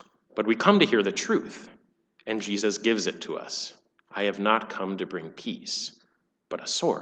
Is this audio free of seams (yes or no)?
no